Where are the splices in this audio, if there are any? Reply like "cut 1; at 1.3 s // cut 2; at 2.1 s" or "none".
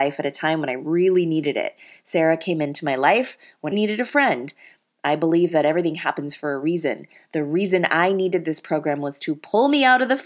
cut 1; at 3.7 s